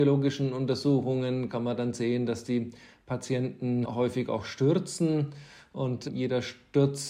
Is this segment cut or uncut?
uncut